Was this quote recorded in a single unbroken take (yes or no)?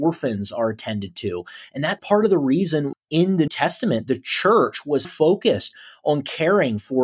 no